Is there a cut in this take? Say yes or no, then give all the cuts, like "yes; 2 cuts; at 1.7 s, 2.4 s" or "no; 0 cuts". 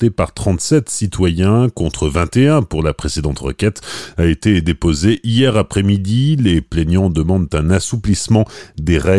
no; 0 cuts